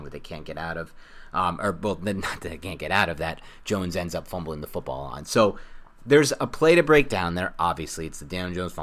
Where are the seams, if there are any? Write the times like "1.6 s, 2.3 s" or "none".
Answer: none